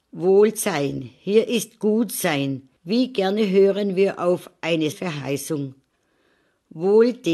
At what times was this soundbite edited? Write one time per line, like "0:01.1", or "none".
0:02.8
0:04.9